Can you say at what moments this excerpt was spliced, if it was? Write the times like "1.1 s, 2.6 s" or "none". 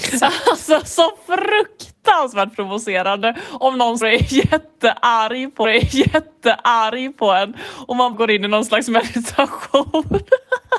4.0 s, 5.6 s, 8.1 s